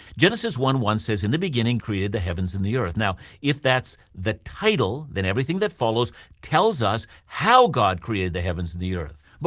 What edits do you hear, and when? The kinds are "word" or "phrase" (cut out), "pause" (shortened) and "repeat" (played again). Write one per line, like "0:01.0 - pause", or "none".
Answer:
0:01.8 - word